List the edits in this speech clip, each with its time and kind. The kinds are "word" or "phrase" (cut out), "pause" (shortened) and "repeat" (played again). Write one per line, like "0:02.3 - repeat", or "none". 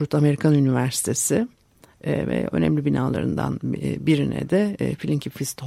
none